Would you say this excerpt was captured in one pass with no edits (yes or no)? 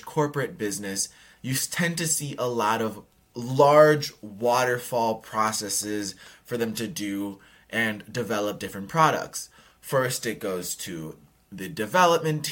yes